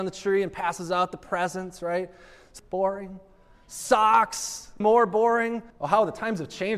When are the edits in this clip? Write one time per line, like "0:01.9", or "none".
0:02.6
0:04.8
0:05.7